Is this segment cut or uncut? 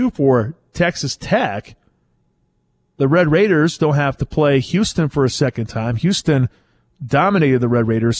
uncut